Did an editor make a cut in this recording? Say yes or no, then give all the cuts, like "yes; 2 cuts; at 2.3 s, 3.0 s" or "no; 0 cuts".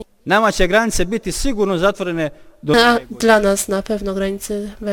no; 0 cuts